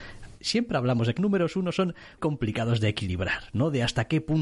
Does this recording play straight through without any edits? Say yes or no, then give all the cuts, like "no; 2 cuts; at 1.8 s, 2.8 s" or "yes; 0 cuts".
no; 2 cuts; at 1.2 s, 2.2 s